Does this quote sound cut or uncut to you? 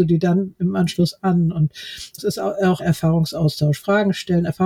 cut